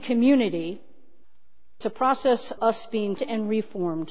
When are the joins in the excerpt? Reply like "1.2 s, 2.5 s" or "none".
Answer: 1.8 s, 2.6 s, 3.2 s